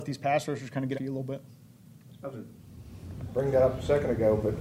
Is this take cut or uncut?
cut